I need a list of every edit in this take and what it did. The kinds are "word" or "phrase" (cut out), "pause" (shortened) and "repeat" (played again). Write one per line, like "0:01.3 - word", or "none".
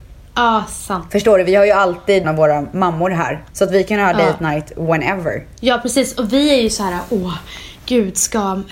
0:02.2 - word
0:03.5 - pause